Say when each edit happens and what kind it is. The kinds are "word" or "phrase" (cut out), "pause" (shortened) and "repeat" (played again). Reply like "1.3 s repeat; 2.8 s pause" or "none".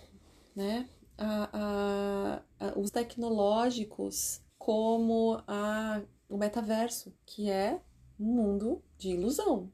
2.5 s pause; 2.9 s word; 4.5 s pause; 7.2 s pause